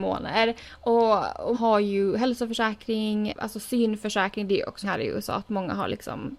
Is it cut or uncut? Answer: cut